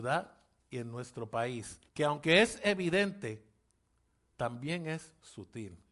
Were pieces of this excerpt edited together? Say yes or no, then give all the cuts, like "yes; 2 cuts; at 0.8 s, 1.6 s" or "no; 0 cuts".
yes; 1 cut; at 1.9 s